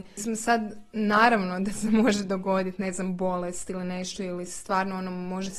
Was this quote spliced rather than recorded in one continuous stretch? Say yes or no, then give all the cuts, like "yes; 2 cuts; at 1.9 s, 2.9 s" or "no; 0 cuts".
no; 0 cuts